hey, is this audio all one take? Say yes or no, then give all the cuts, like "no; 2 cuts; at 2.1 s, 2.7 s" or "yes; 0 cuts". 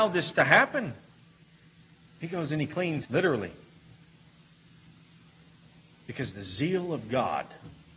no; 1 cut; at 3.0 s